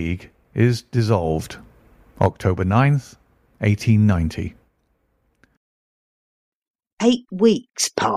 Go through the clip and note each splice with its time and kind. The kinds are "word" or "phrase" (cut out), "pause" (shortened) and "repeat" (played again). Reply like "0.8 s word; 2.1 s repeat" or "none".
none